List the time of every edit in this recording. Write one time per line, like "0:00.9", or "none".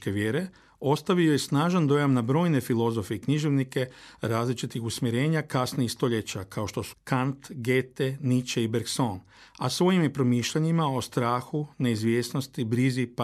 0:06.9